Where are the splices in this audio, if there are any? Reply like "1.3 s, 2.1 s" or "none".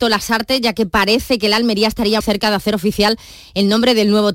2.2 s